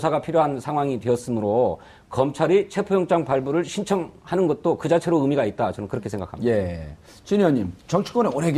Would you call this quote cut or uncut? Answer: uncut